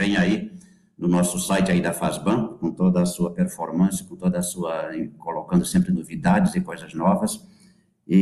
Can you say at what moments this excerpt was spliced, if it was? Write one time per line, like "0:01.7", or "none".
none